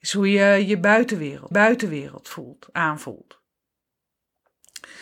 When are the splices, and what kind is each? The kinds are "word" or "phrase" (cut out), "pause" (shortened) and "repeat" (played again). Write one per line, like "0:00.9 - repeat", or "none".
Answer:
0:01.5 - repeat

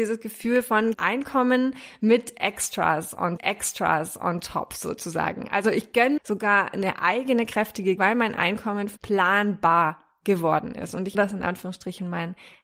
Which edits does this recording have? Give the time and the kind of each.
0:00.9 - word
0:03.4 - repeat
0:06.2 - phrase
0:08.0 - word
0:09.0 - word
0:11.1 - word

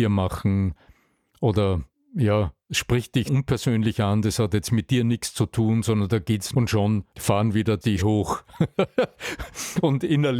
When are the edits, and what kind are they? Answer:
0:01.9 - pause
0:03.3 - word
0:06.5 - phrase
0:07.1 - pause
0:08.0 - word

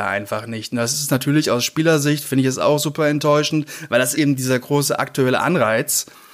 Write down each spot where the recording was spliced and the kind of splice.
0:04.2 - word

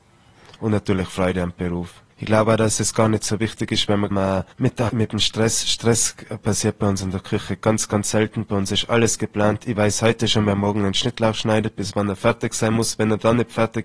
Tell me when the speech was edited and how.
0:02.1 - pause
0:04.1 - phrase
0:04.5 - pause
0:04.9 - phrase

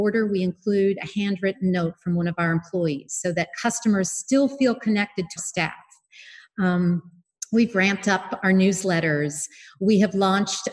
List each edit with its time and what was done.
0:05.4 - word

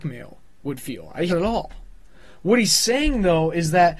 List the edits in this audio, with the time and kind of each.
0:01.3 - phrase

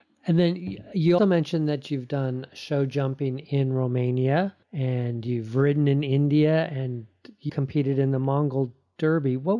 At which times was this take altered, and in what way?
0:01.2 - word
0:04.6 - pause
0:07.5 - word

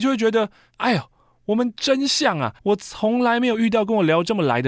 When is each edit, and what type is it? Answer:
0:02.6 - pause

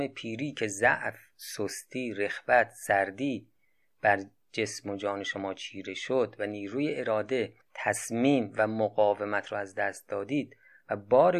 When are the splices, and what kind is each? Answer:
none

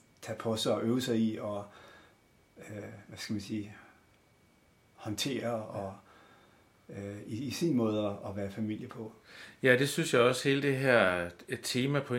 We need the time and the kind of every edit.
none

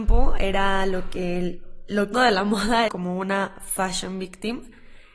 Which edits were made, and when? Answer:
0:02.1 - phrase
0:02.9 - phrase

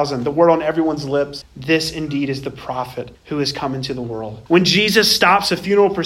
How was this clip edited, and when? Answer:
0:01.4 - word
0:03.1 - pause
0:04.5 - pause

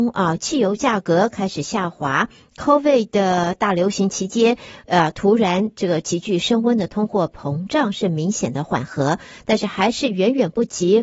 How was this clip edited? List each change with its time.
none

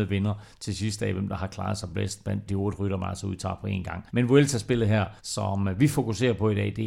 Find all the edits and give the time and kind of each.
0:02.5 - word
0:04.1 - pause
0:05.2 - pause

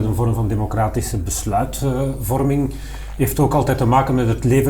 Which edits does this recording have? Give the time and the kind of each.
none

